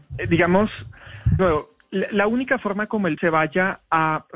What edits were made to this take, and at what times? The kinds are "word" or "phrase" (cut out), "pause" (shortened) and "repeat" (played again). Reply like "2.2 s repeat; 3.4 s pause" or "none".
1.4 s word; 3.2 s word